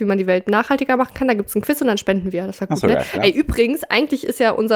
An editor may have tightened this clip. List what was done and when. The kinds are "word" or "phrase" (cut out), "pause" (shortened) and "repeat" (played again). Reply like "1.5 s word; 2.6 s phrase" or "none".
none